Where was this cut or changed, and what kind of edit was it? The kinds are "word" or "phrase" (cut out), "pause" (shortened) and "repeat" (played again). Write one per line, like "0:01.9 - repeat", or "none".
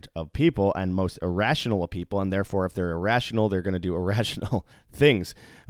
0:04.7 - pause